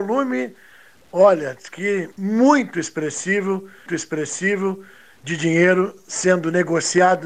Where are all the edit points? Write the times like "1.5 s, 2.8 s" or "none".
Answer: 2.1 s, 3.9 s